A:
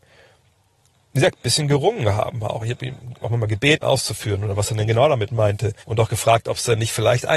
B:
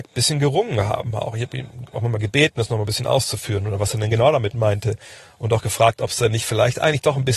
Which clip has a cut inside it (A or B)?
A